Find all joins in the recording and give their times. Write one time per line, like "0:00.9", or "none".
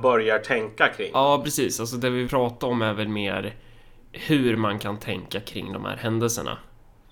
0:02.3